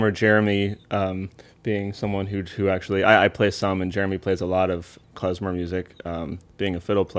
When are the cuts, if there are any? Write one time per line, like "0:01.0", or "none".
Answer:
none